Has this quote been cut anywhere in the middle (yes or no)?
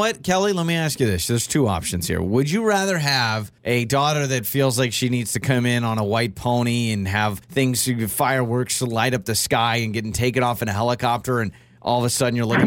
yes